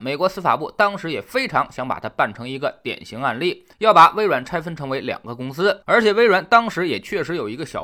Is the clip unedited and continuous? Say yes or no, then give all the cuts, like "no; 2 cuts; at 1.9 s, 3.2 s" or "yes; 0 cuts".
no; 1 cut; at 3.7 s